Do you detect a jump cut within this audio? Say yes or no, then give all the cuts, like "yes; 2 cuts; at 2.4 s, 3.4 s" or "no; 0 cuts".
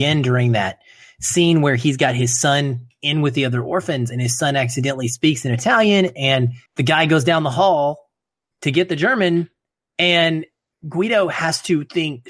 yes; 1 cut; at 6.7 s